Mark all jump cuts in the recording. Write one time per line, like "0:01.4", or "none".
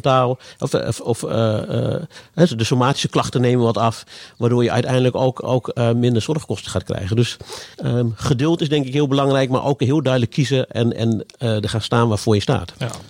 0:07.7